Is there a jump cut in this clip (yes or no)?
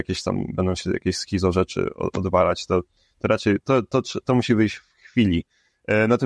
no